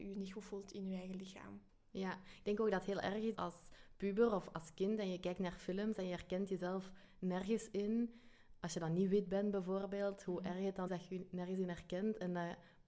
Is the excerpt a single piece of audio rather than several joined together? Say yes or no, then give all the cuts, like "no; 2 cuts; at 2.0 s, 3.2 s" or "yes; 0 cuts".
no; 3 cuts; at 1.7 s, 3.3 s, 10.9 s